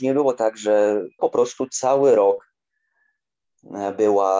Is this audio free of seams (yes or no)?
no